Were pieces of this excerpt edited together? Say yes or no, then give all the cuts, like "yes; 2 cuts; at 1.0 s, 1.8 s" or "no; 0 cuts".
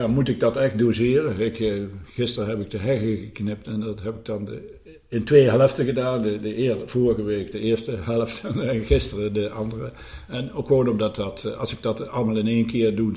no; 0 cuts